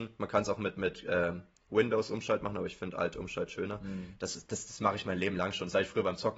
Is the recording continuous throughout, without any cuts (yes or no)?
yes